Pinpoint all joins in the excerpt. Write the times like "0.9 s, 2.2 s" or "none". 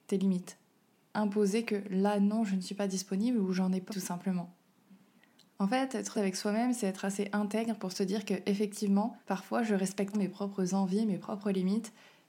3.9 s, 6.1 s, 9.2 s, 10.1 s